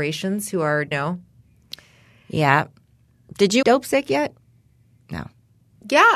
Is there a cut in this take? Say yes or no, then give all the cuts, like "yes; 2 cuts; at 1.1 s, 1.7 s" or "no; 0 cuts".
yes; 2 cuts; at 0.9 s, 3.6 s